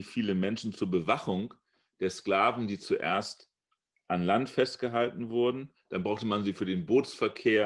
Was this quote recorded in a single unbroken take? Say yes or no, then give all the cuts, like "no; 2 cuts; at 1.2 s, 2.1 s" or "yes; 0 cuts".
yes; 0 cuts